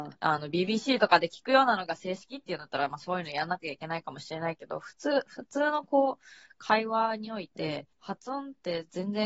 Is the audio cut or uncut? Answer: cut